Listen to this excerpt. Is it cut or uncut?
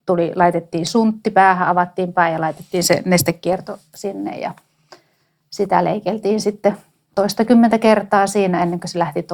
uncut